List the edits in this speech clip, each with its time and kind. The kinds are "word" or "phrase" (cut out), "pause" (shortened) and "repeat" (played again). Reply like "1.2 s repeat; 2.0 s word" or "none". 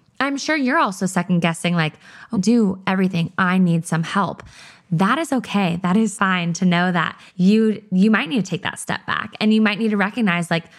2.3 s phrase; 6.1 s word; 7.3 s pause